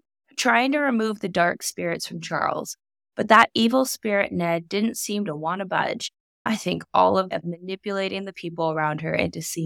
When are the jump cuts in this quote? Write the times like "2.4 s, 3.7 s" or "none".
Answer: 7.3 s